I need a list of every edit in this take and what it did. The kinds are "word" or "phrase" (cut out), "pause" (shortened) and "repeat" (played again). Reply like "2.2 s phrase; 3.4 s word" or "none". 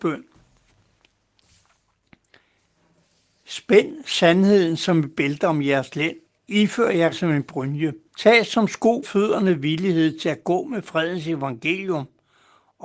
6.3 s pause; 7.1 s word; 8.1 s pause; 9.0 s word